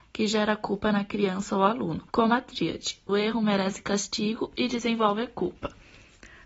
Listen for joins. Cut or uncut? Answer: cut